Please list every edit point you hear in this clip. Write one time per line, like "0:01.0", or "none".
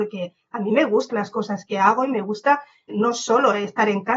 0:01.1
0:02.9